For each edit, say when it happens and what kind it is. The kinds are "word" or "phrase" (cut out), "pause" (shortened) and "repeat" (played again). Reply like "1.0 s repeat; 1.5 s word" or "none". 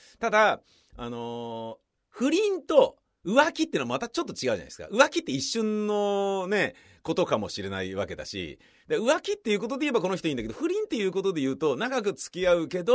none